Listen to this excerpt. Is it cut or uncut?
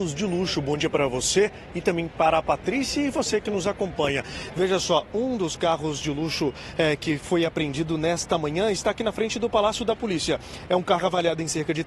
uncut